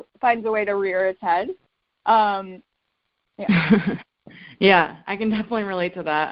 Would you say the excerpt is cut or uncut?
uncut